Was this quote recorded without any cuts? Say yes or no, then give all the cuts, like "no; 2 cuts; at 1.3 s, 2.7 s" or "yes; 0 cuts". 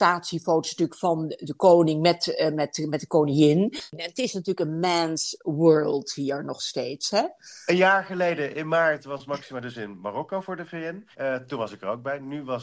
no; 1 cut; at 11.1 s